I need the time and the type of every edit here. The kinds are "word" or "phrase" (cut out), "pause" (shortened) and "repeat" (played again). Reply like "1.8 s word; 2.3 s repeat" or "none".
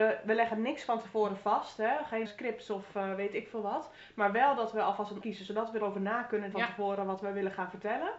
2.2 s word; 5.2 s word; 5.8 s word; 6.5 s word